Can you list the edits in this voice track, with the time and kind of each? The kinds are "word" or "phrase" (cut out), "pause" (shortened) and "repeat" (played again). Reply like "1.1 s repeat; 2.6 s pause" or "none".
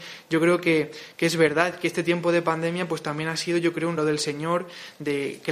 4.0 s word